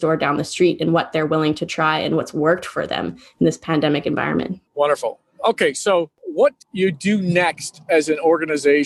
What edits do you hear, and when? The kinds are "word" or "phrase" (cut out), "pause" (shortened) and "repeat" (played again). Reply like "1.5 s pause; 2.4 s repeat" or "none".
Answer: 4.7 s pause; 6.2 s pause; 6.6 s word